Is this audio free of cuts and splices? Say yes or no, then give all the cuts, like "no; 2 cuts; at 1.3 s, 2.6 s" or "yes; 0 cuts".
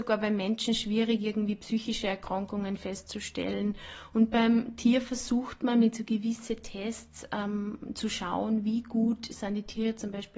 yes; 0 cuts